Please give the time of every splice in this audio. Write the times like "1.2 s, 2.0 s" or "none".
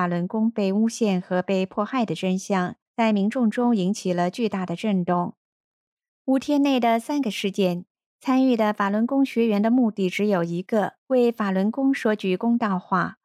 2.8 s, 11.0 s